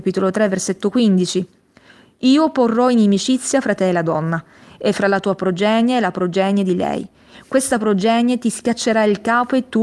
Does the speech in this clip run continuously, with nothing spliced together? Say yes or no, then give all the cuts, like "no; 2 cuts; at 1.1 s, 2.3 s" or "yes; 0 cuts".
yes; 0 cuts